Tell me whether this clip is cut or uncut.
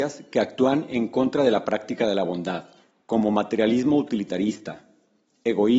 cut